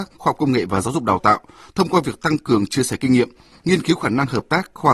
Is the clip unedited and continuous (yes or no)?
yes